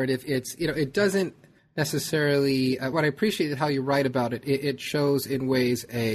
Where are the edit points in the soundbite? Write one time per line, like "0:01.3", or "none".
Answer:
0:01.6
0:02.9